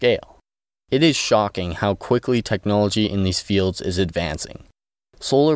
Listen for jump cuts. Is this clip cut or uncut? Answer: uncut